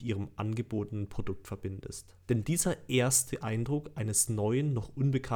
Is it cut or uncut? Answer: cut